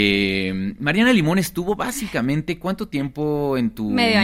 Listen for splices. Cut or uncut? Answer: uncut